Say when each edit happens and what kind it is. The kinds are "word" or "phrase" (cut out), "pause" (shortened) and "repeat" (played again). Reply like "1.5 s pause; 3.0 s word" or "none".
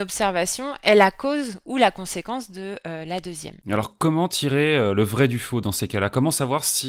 3.6 s pause